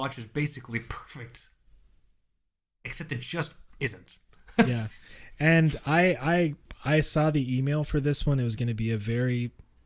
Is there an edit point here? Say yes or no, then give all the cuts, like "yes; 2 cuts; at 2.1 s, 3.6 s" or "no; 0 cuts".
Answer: no; 0 cuts